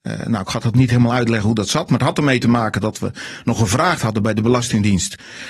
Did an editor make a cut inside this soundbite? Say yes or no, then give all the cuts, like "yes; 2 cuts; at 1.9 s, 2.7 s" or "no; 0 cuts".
yes; 1 cut; at 4.0 s